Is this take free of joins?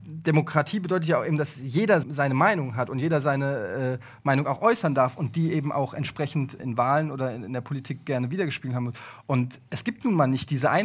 no; 2 cuts; at 2.0 s, 6.6 s

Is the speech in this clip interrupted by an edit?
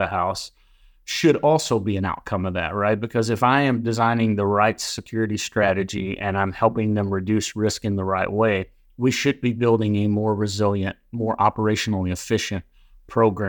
no; 0 cuts

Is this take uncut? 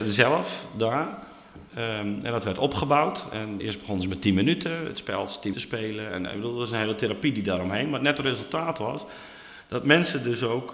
no; 3 cuts; at 1.7 s, 3.6 s, 5.5 s

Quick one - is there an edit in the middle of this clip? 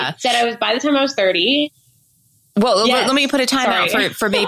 no; 0 cuts

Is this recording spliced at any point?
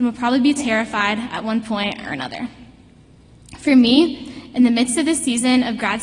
no; 0 cuts

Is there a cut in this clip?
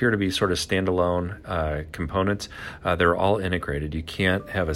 no; 0 cuts

